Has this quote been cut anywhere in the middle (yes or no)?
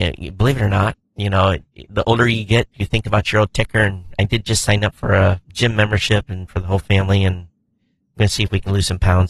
yes